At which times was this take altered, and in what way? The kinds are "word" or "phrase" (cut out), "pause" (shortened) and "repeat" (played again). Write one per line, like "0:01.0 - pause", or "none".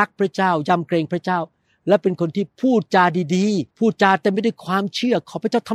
0:03.7 - pause